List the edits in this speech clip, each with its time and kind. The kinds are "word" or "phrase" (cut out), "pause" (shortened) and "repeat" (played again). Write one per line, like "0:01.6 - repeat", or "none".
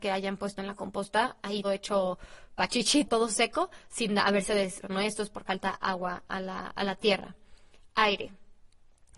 0:01.6 - word
0:03.1 - word
0:04.8 - word
0:05.5 - word

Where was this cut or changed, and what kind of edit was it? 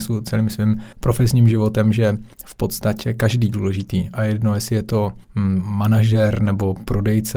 0:00.9 - pause
0:02.3 - pause
0:03.5 - phrase
0:05.2 - pause

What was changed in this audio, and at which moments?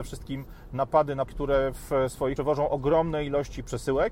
0:01.3 - word
0:02.4 - word

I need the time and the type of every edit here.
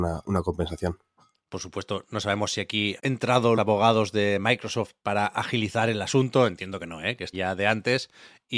0:03.0 - word
0:03.6 - word
0:07.3 - word

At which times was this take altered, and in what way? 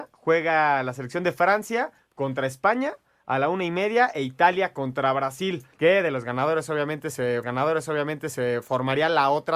0:05.7 - pause
0:07.4 - repeat

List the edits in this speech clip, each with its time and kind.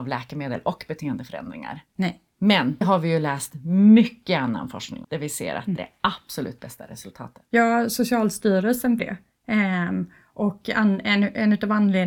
0:01.9 - pause
0:02.8 - word
0:05.0 - word
0:05.8 - word
0:07.5 - pause
0:09.0 - word

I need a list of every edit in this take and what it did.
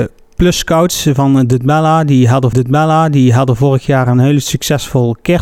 0:02.5 - repeat

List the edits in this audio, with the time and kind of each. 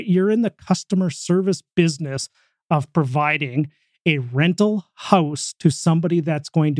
none

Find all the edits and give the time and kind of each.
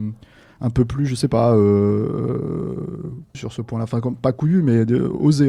0:03.3 - word

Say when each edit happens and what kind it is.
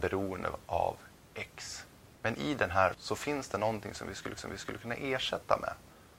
0:02.2 - pause
0:02.9 - word
0:04.4 - repeat

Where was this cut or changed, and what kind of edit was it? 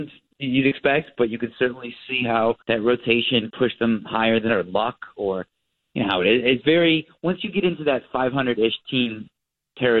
0:02.6 - pause
0:03.5 - word
0:04.5 - word
0:06.6 - word

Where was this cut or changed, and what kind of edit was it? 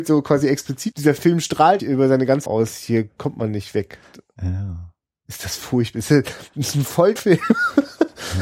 0:00.9 - word
0:01.8 - word
0:02.5 - word
0:07.2 - word

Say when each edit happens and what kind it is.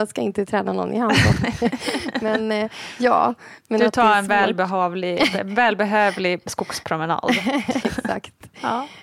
0:07.8 - word

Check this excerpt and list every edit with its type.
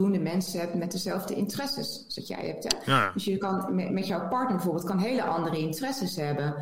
none

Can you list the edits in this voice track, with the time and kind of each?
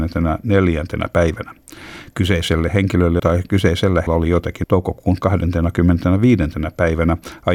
0:03.2 - word
0:04.1 - word
0:04.6 - word

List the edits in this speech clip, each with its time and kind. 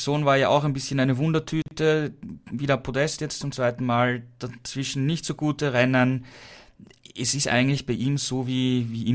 none

